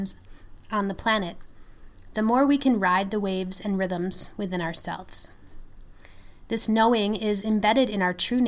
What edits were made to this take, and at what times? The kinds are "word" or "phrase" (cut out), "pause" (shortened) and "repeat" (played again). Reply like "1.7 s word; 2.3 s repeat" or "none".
none